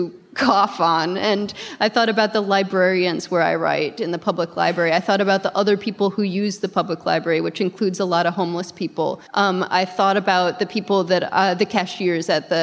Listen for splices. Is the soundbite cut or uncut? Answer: cut